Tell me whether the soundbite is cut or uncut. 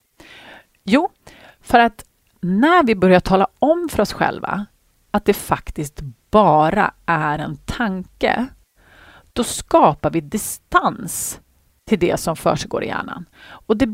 uncut